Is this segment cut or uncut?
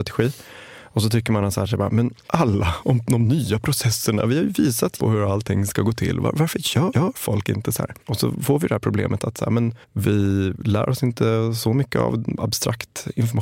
cut